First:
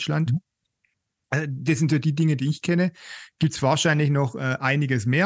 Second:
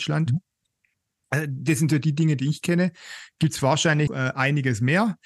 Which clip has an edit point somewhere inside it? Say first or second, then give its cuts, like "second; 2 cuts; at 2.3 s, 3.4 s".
second; 1 cut; at 4.1 s